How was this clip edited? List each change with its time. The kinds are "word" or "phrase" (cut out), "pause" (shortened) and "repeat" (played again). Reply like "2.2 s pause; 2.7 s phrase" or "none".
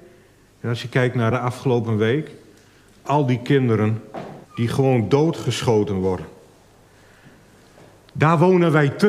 1.3 s word; 4.4 s pause